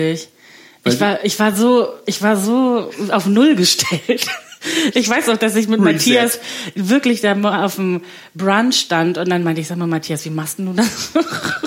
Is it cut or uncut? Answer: uncut